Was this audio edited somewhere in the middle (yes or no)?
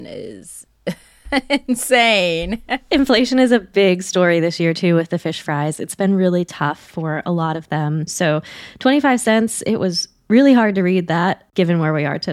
no